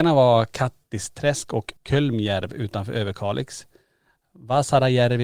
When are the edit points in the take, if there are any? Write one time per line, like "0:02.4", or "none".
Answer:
0:01.8